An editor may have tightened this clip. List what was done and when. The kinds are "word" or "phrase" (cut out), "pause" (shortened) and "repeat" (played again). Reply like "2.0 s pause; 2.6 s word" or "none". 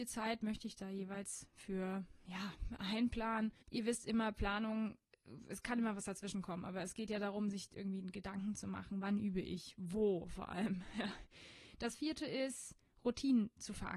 3.6 s pause